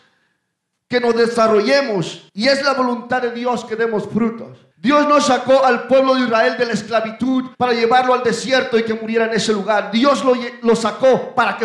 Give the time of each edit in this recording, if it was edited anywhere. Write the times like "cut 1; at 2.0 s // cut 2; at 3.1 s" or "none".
cut 1; at 2.3 s // cut 2; at 4.7 s // cut 3; at 7.5 s